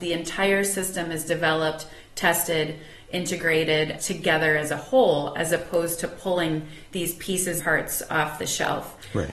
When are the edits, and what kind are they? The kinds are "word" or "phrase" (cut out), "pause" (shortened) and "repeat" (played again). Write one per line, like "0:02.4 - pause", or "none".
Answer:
0:04.0 - phrase
0:07.6 - word